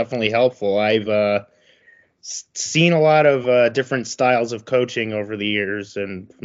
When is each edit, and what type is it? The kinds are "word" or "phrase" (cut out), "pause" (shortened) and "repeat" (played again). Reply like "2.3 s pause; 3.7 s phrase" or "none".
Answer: none